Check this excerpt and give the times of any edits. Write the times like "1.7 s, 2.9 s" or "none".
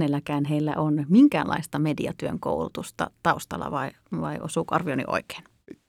none